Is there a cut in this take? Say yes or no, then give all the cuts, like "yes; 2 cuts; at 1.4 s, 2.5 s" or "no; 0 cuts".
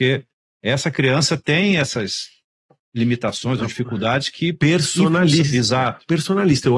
no; 0 cuts